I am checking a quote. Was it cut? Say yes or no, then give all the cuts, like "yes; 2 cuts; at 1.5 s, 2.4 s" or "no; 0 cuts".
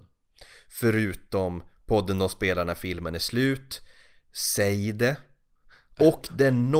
no; 0 cuts